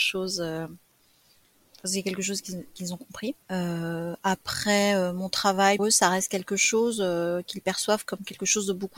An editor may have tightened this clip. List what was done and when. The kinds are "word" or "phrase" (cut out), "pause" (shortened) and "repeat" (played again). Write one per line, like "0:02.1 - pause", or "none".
0:03.4 - pause
0:05.8 - word